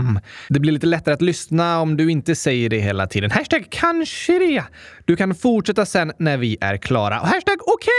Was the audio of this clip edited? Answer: no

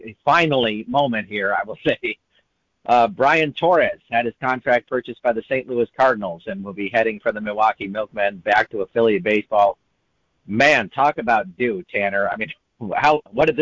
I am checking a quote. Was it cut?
no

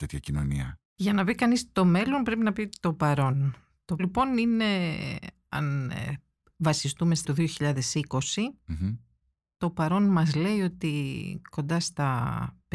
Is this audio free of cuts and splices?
no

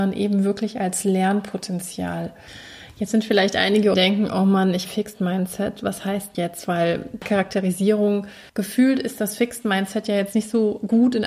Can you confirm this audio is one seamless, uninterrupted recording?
no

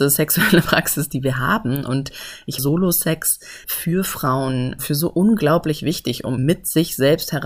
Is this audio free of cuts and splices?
no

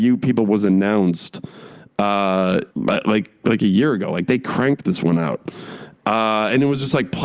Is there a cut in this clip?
yes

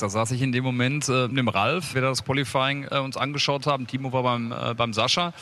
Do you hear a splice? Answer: yes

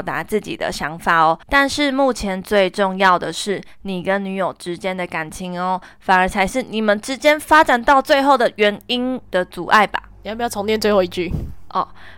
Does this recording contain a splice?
yes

